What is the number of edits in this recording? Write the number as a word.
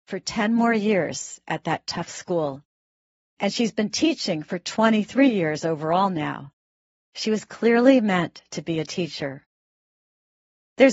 zero